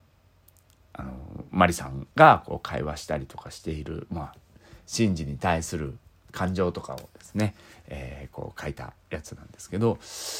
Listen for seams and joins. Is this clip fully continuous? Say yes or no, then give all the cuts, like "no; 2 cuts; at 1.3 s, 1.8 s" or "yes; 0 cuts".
no; 1 cut; at 2.1 s